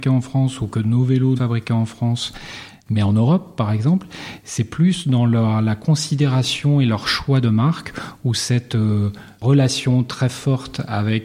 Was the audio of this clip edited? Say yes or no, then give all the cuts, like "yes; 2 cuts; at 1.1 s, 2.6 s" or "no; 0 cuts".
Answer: yes; 1 cut; at 1.4 s